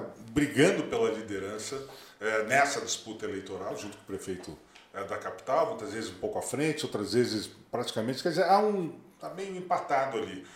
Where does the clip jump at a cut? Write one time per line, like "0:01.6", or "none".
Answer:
none